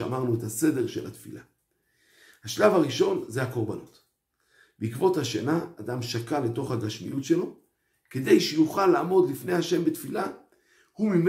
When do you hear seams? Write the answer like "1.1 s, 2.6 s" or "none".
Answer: none